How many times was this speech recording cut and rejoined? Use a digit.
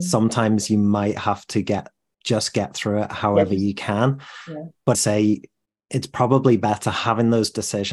1